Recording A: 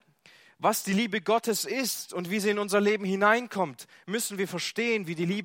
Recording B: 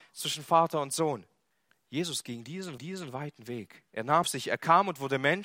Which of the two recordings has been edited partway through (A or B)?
B